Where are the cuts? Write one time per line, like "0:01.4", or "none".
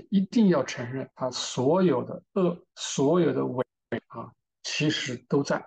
0:01.1
0:02.7